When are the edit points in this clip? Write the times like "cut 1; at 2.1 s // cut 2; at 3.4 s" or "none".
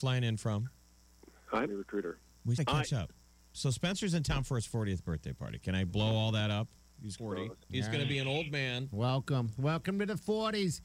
cut 1; at 1.7 s // cut 2; at 2.6 s // cut 3; at 7.2 s // cut 4; at 7.6 s